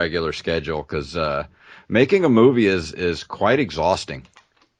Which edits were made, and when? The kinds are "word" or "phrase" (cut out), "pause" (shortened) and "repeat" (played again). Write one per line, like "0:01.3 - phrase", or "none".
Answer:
none